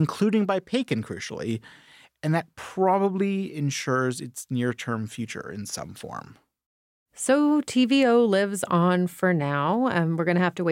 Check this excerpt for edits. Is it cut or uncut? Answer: uncut